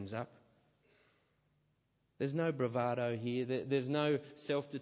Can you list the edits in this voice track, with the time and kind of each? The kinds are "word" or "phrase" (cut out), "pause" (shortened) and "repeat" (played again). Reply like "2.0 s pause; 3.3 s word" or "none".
none